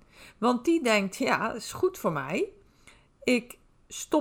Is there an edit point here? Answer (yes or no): no